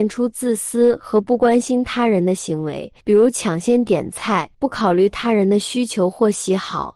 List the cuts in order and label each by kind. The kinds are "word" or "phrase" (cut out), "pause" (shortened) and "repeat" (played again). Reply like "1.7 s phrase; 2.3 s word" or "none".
3.0 s pause; 4.5 s pause